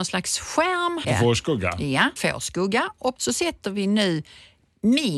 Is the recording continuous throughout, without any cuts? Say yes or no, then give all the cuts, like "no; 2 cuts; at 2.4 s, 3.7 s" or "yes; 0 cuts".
no; 3 cuts; at 1.0 s, 2.2 s, 3.2 s